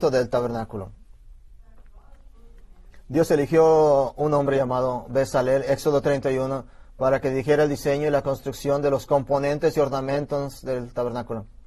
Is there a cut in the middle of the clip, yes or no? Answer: no